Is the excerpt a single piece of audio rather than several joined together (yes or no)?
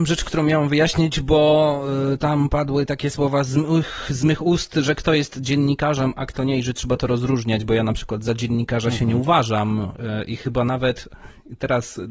yes